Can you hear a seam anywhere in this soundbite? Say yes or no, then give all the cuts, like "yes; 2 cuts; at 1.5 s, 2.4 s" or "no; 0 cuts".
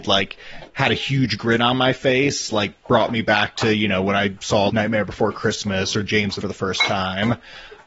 yes; 2 cuts; at 4.7 s, 6.4 s